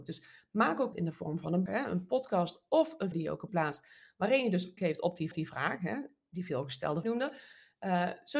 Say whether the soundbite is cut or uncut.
cut